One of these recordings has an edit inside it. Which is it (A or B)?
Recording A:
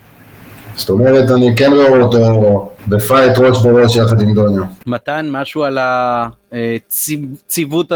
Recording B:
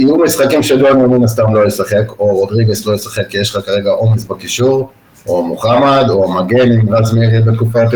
A